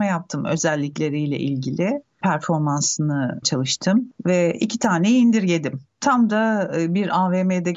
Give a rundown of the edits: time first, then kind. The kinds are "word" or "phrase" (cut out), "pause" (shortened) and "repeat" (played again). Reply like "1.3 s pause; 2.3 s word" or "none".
3.4 s word